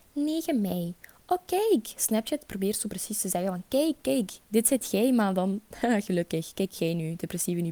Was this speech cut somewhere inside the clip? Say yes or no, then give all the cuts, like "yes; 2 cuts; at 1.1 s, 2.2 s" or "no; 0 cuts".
yes; 1 cut; at 4.4 s